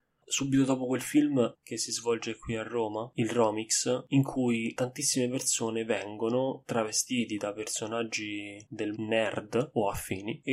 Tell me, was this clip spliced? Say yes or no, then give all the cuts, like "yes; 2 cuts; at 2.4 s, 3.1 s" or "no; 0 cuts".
yes; 2 cuts; at 1.5 s, 8.9 s